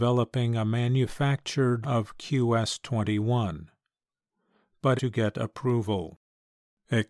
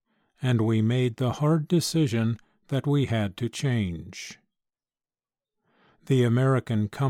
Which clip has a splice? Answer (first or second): first